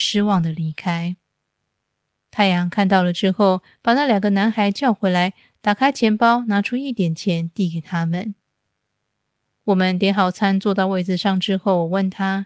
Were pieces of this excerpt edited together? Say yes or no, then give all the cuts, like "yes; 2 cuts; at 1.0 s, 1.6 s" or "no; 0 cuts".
no; 0 cuts